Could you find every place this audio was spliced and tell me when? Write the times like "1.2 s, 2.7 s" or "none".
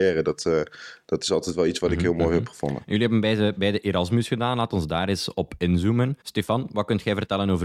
6.2 s